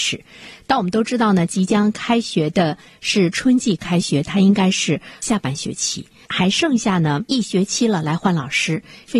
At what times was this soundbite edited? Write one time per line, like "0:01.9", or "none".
none